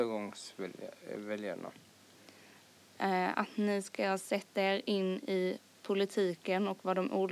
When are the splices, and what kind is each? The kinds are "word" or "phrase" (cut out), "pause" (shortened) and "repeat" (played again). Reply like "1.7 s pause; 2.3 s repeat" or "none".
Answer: none